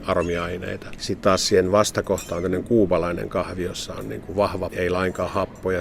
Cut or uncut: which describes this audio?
cut